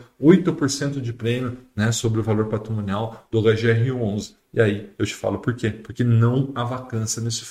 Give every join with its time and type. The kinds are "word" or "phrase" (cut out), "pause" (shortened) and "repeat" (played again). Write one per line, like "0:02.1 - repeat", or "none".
none